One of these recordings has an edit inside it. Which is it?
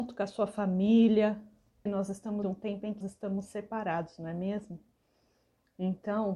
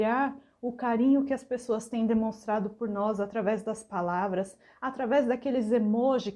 first; 3 cuts; at 1.9 s, 2.4 s, 3.0 s

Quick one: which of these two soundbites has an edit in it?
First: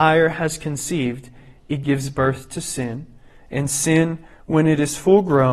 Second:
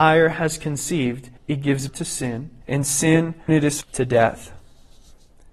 second; 5 cuts; at 1.4 s, 1.9 s, 2.6 s, 3.5 s, 3.8 s

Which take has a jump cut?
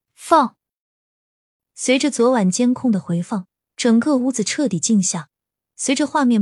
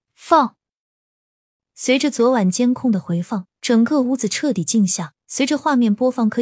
second; 2 cuts; at 3.6 s, 5.2 s

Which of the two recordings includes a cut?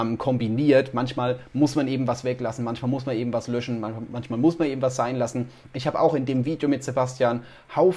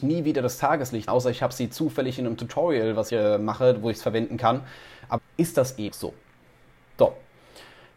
second; 4 cuts; at 1.1 s, 3.1 s, 5.2 s, 5.9 s

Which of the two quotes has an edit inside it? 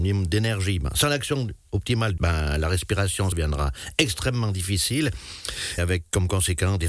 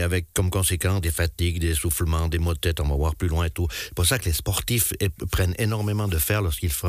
first; 3 cuts; at 2.2 s, 3.3 s, 5.8 s

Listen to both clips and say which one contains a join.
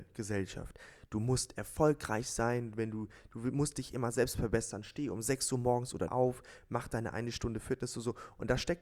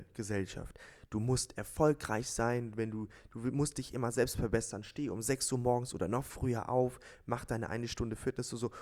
first; 1 cut; at 6.1 s

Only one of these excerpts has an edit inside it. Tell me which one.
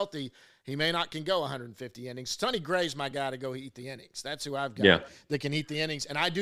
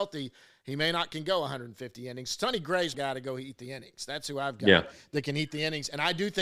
second; 1 cut; at 2.9 s

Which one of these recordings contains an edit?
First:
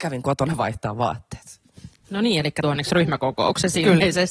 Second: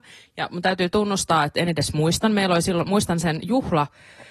first; 1 cut; at 2.6 s

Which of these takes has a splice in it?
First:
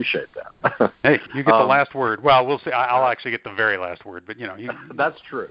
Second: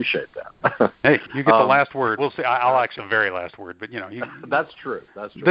second; 2 cuts; at 2.2 s, 3.0 s

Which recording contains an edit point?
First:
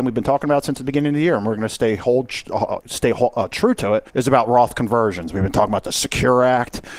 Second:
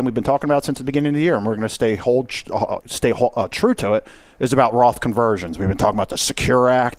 first; 1 cut; at 4.1 s

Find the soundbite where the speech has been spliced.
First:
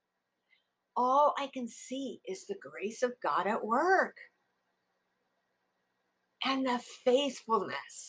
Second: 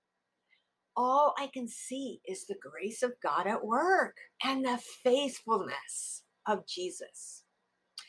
second; 1 cut; at 4.3 s

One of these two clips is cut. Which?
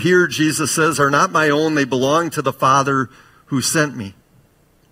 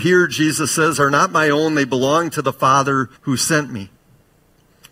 second; 1 cut; at 3.2 s

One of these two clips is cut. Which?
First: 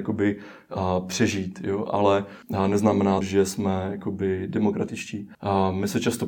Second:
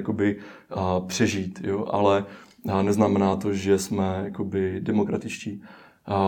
first; 3 cuts; at 2.4 s, 3.2 s, 5.3 s

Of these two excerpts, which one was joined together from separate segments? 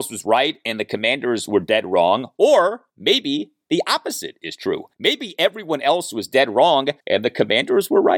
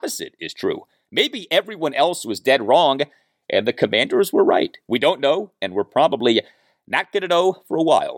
first; 3 cuts; at 2.9 s, 4.9 s, 7.0 s

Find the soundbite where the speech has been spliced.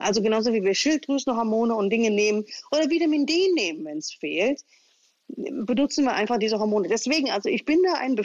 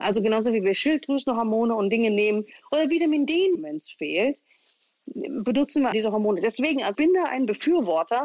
second; 3 cuts; at 3.5 s, 5.9 s, 6.9 s

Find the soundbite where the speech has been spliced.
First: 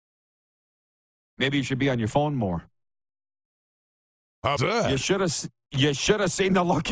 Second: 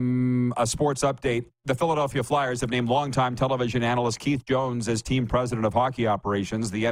first; 1 cut; at 4.6 s

